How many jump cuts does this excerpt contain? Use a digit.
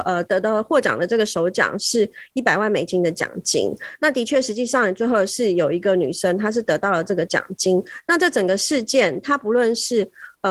1